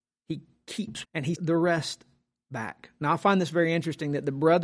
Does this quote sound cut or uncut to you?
cut